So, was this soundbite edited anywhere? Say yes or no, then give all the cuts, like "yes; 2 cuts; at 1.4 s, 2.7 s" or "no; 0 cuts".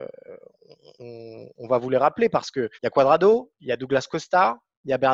yes; 1 cut; at 2.7 s